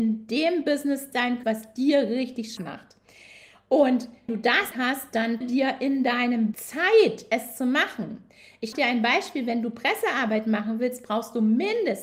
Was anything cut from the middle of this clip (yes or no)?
yes